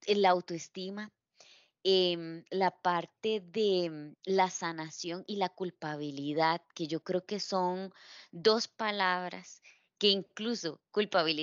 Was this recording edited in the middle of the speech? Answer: no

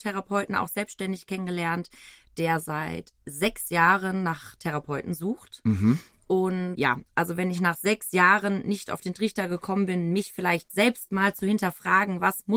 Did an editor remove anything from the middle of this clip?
no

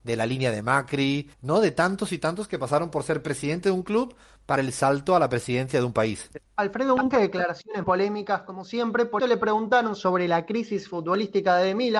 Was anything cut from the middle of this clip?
yes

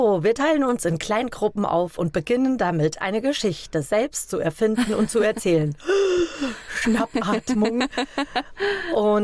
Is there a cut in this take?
no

